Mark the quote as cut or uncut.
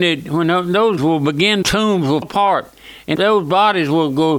cut